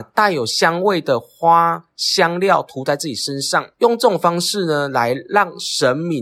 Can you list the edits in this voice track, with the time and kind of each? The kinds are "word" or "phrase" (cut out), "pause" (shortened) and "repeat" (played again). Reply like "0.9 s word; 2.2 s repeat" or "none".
3.7 s pause